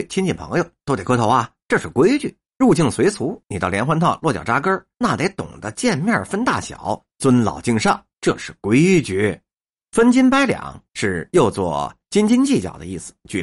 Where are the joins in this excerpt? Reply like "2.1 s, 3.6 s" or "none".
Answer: 1.6 s, 2.5 s, 4.9 s, 8.1 s, 9.5 s, 10.9 s